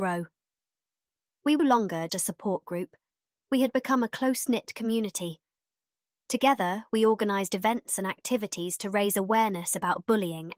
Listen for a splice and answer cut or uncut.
cut